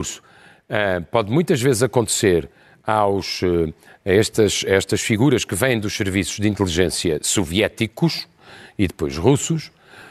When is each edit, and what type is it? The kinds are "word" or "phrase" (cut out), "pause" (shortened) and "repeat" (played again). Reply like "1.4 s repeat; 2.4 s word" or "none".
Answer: none